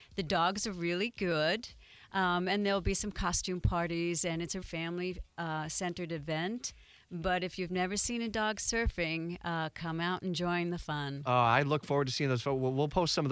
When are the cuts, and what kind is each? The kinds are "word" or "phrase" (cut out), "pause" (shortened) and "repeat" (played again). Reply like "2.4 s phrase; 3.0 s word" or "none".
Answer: 4.6 s word